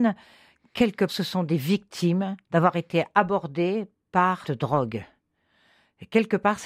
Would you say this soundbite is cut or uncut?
cut